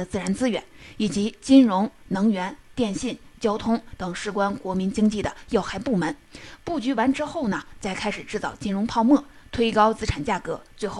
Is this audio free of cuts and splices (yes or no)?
yes